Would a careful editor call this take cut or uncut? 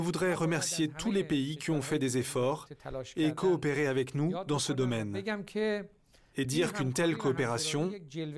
uncut